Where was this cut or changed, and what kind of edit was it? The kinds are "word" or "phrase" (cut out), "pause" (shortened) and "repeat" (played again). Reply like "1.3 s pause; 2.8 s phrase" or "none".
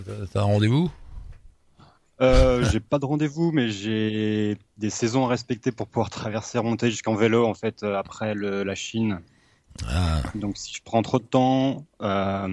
none

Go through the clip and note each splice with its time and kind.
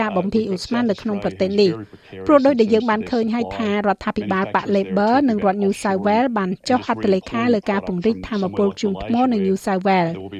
none

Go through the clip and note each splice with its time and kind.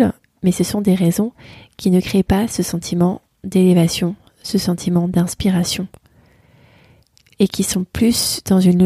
none

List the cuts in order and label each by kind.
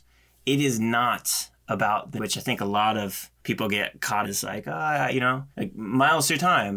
2.2 s phrase; 3.4 s pause; 4.2 s phrase; 5.5 s pause

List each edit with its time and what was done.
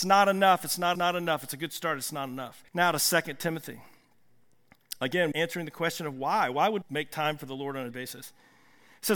0.9 s repeat; 2.7 s pause; 5.3 s word; 6.8 s word; 7.9 s word

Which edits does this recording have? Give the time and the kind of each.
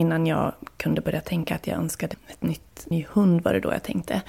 2.1 s word; 2.9 s word

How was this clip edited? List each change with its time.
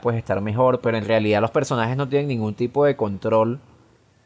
none

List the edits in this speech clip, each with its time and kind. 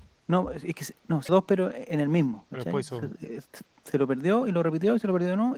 1.3 s word

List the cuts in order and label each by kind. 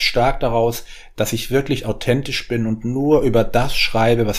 none

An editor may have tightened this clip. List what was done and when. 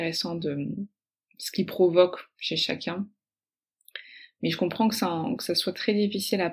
none

